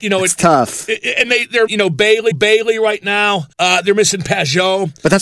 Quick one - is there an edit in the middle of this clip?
yes; 3 cuts; at 1.7 s, 2.3 s, 3.5 s

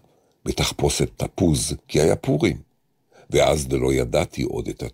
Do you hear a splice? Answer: yes; 1 cut; at 1.8 s

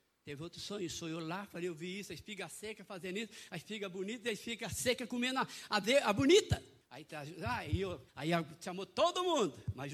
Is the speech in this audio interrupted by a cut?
yes; 2 cuts; at 6.8 s, 8.1 s

